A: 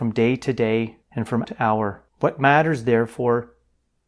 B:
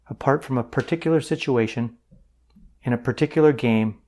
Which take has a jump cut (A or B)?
A